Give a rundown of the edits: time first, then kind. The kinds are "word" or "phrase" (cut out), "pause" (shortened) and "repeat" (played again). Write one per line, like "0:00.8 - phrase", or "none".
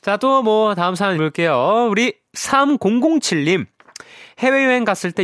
0:01.2 - word